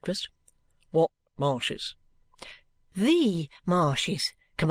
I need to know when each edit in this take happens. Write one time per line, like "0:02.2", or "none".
none